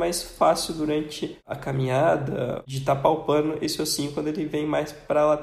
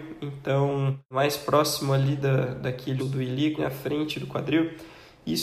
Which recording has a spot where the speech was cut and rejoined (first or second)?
second